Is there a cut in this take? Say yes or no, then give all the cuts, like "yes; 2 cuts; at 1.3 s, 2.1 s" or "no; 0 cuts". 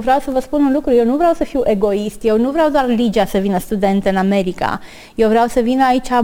no; 0 cuts